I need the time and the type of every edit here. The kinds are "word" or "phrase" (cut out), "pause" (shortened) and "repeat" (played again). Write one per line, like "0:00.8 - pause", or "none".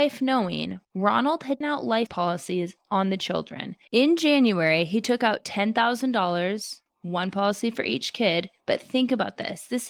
0:01.6 - word
0:02.1 - word
0:03.8 - pause
0:06.9 - pause